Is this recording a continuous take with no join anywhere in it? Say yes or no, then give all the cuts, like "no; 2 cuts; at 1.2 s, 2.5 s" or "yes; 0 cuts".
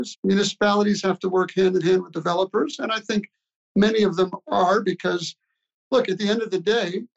yes; 0 cuts